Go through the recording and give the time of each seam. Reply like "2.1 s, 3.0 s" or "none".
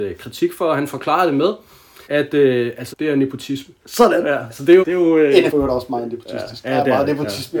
2.0 s, 2.9 s, 3.8 s, 4.8 s, 5.5 s